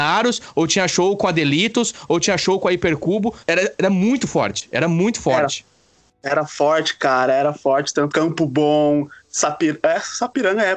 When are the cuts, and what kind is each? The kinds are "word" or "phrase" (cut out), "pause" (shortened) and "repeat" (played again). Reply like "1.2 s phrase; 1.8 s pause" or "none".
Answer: 3.4 s pause; 8.1 s phrase